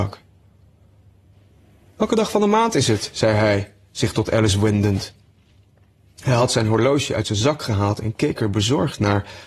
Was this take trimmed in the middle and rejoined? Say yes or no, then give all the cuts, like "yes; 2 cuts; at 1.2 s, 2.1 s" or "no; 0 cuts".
no; 0 cuts